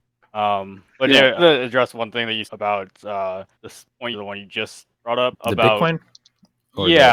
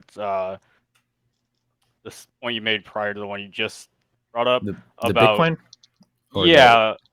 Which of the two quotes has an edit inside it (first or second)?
first